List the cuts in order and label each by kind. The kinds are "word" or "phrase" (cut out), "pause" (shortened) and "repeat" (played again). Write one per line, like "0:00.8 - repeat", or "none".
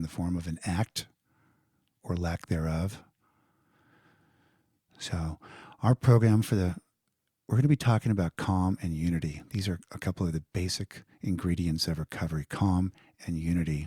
none